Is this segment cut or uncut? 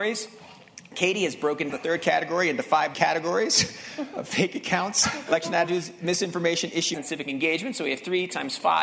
cut